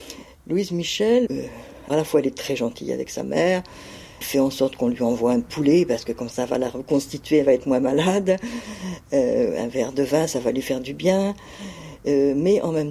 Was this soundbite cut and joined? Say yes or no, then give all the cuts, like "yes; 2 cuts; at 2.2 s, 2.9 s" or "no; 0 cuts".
yes; 4 cuts; at 1.3 s, 1.9 s, 4.2 s, 6.3 s